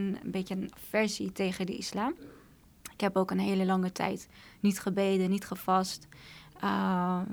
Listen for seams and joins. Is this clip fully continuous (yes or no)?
yes